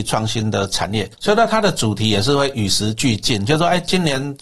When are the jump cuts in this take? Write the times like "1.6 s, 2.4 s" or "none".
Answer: 1.1 s